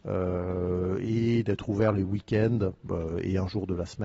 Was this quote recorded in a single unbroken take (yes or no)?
yes